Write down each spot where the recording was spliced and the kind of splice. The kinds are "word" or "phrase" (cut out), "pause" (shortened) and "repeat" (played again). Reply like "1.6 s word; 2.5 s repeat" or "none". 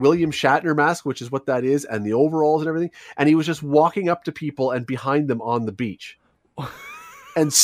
none